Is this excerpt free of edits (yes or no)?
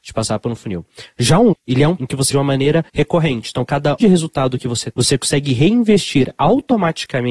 no